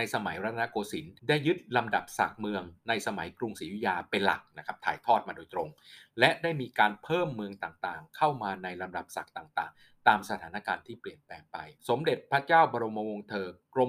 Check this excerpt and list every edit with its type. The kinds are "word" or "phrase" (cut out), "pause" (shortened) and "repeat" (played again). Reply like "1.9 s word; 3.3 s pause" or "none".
1.2 s pause; 11.8 s pause